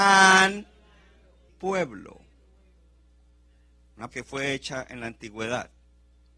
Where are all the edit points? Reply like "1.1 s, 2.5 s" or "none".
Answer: 1.5 s, 4.1 s